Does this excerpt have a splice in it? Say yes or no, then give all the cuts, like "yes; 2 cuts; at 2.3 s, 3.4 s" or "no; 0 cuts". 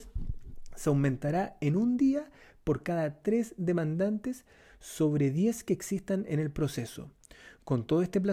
no; 0 cuts